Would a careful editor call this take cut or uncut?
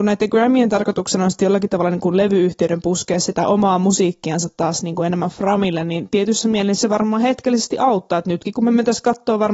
uncut